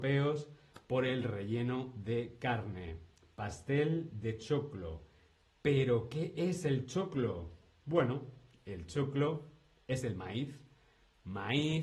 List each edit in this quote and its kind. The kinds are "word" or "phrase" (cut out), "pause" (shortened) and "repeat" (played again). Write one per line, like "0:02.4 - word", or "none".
none